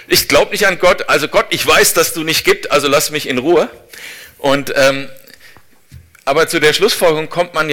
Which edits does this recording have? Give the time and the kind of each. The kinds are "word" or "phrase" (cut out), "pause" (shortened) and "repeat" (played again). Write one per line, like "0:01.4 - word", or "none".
none